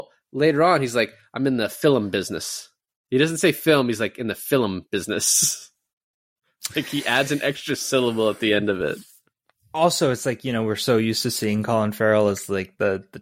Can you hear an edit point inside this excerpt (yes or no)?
no